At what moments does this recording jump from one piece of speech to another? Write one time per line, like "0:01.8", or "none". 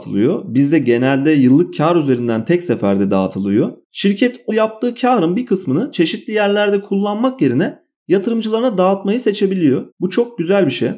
0:04.5
0:09.9

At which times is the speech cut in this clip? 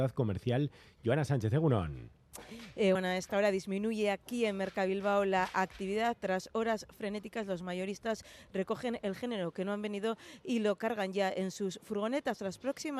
0:02.9

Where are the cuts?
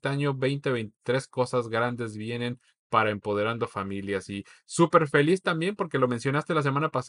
none

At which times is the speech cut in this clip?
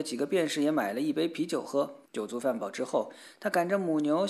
0:02.1

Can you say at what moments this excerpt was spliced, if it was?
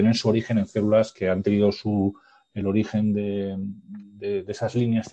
none

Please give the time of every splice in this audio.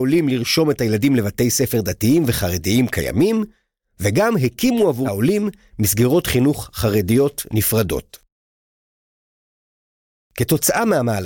0:05.0

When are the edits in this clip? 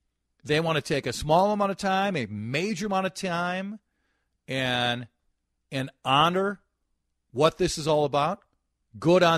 none

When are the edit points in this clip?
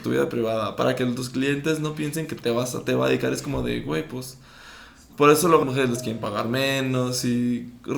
0:05.6

